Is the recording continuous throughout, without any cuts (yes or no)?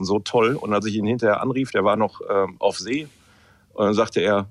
yes